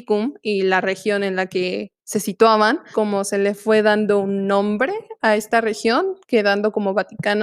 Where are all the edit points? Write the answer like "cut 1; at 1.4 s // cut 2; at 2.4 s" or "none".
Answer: cut 1; at 2.0 s // cut 2; at 2.9 s